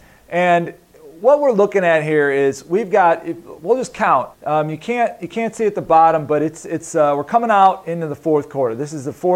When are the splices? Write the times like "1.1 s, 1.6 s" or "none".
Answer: 4.3 s